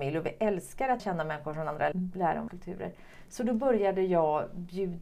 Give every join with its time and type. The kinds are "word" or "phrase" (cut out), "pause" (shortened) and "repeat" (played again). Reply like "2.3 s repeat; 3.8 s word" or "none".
1.0 s word; 1.9 s phrase; 2.5 s word